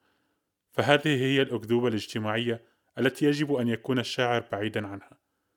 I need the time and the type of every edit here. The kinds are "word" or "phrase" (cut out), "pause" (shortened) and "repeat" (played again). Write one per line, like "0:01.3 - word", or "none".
none